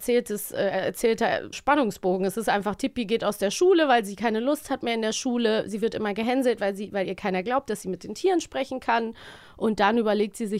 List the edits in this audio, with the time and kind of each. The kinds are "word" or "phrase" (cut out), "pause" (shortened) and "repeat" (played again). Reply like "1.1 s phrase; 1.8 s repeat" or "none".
1.5 s word